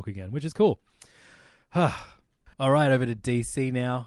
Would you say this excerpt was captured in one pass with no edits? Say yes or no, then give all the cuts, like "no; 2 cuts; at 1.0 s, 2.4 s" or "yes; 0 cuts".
no; 1 cut; at 2.5 s